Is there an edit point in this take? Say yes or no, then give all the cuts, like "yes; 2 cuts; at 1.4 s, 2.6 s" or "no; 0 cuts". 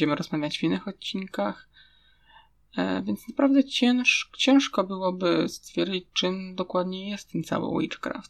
no; 0 cuts